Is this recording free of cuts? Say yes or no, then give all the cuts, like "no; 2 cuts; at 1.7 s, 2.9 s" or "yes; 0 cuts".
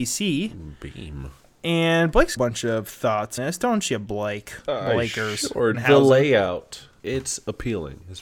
no; 4 cuts; at 2.4 s, 3.4 s, 5.7 s, 7.0 s